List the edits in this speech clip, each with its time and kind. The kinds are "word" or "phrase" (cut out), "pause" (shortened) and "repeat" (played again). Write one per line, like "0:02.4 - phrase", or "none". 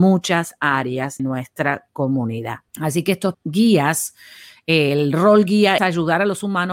0:01.2 - word
0:02.7 - pause
0:03.3 - word
0:05.8 - word